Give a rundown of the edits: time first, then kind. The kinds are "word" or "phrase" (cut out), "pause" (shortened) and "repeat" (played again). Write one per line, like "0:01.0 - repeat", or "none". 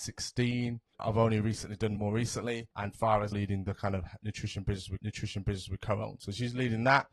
0:00.9 - word
0:02.0 - phrase
0:02.7 - pause
0:03.3 - word
0:05.0 - repeat